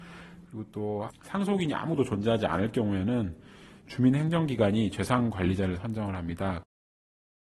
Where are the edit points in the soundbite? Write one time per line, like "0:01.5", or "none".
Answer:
none